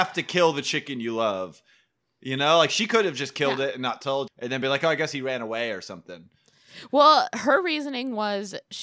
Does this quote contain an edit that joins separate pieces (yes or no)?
yes